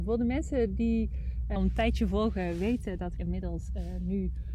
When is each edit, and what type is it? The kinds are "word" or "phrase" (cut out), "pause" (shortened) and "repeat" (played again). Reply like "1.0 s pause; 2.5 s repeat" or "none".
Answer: 1.6 s word; 3.2 s word